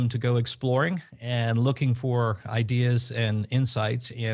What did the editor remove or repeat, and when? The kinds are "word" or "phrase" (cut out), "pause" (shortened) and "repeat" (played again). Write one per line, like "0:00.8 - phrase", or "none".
none